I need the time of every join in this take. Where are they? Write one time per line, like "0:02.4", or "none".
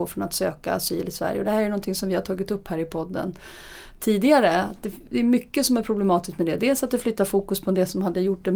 none